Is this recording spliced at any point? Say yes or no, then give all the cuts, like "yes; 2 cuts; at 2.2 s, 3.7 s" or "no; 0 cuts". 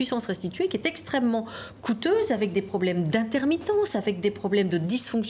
no; 0 cuts